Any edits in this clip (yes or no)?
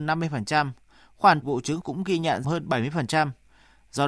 yes